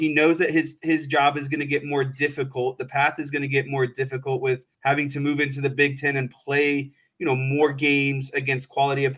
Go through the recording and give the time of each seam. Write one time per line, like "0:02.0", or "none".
0:04.7